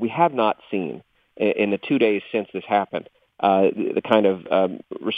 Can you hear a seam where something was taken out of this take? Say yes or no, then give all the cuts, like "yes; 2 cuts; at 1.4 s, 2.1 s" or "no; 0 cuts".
no; 0 cuts